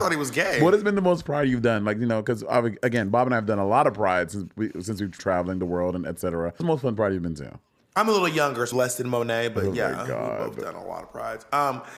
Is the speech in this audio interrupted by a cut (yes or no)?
yes